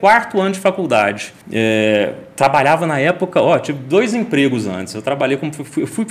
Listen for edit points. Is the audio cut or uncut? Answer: cut